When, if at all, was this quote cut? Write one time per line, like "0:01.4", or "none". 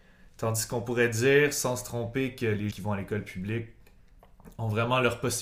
0:02.7